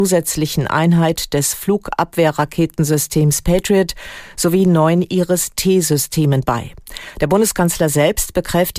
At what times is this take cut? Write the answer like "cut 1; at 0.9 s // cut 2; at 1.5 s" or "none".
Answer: none